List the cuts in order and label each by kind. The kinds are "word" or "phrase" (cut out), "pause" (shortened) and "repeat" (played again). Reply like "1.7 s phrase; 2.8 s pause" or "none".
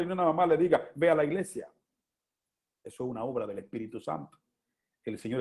none